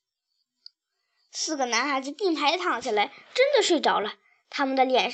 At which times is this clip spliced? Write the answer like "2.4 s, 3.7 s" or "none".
none